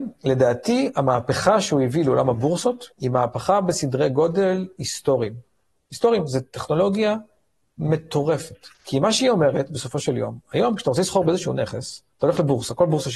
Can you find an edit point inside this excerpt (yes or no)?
yes